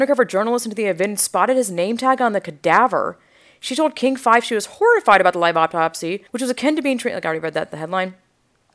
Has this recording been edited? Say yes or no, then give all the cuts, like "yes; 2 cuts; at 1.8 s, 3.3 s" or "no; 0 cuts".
yes; 1 cut; at 6.3 s